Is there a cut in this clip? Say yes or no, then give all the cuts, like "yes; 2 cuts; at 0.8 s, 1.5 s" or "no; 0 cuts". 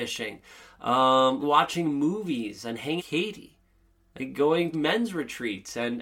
yes; 4 cuts; at 1.4 s, 3.0 s, 3.9 s, 4.7 s